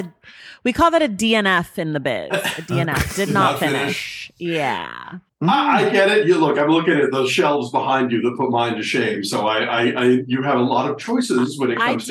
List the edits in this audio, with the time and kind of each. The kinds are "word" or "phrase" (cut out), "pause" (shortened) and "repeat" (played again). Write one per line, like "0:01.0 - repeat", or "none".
none

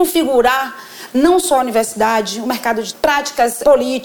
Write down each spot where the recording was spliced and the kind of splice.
0:02.9 - word

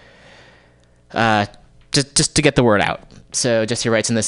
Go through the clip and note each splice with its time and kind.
0:03.2 - pause

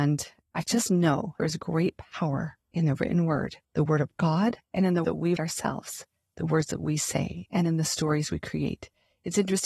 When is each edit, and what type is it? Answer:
0:01.4 - phrase
0:02.6 - pause
0:04.6 - pause
0:05.0 - word
0:05.4 - word

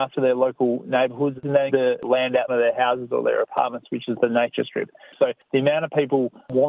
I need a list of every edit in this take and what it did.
0:01.7 - word
0:02.5 - phrase

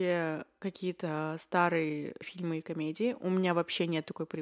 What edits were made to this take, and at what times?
0:02.2 - word

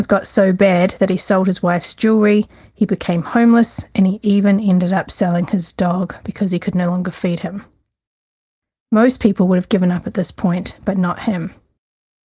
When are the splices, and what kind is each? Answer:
none

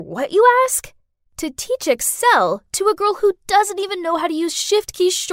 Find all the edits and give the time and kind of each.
none

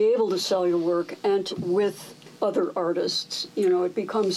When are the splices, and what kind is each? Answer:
0:01.5 - word
0:02.3 - pause

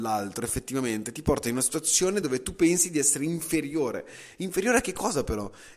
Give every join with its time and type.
none

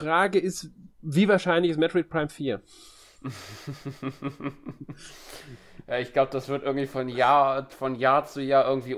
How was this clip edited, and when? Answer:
0:00.9 - pause

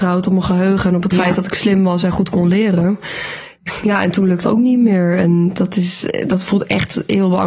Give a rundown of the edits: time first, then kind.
0:04.4 - word

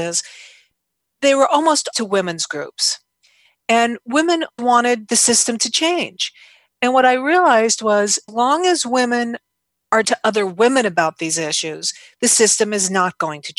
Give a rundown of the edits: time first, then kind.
0:01.9 - word
0:04.6 - word
0:08.3 - word
0:10.0 - word

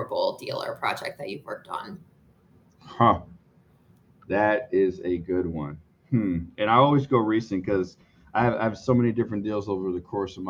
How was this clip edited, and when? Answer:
none

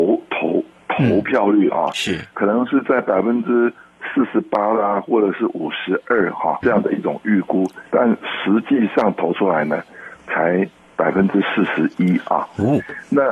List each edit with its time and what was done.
0:06.6 - word
0:07.9 - pause

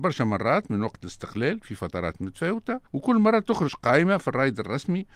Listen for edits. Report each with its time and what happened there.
0:02.9 - pause

